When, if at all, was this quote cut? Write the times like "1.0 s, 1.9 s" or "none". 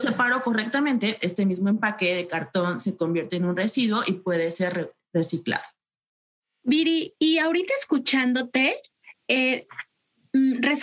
none

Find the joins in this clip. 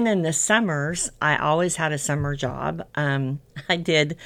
none

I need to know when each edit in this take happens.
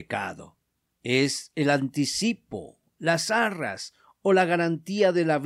none

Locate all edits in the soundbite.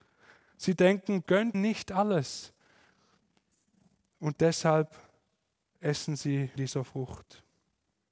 1.2 s, 1.5 s, 6.6 s

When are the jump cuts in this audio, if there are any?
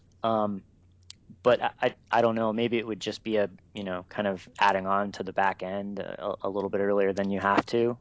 none

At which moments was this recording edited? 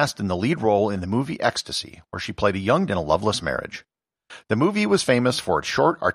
2.9 s

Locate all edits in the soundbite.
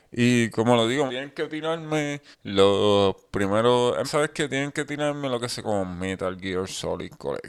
1.1 s, 2.3 s, 4.0 s, 5.6 s

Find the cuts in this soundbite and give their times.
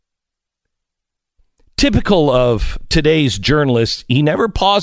none

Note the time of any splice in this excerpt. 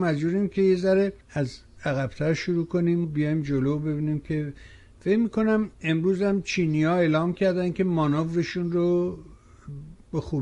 1.2 s, 3.0 s, 5.7 s

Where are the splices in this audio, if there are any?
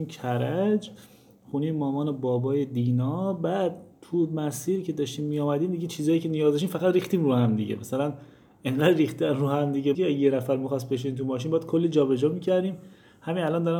9.9 s

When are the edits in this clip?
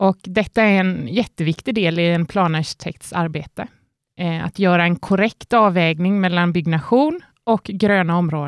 none

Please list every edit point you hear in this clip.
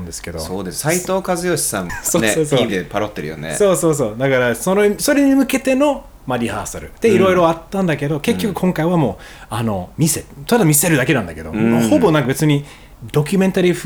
1.9 s, 2.7 s, 9.9 s

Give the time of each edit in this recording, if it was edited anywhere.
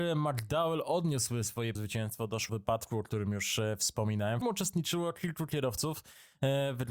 1.7 s, 2.5 s, 4.4 s

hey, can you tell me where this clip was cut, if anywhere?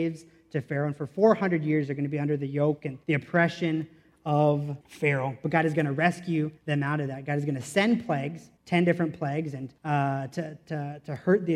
3.0 s, 4.8 s, 6.6 s, 8.6 s, 9.8 s

